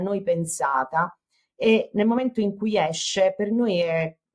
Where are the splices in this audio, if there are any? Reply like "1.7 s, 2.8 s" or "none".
none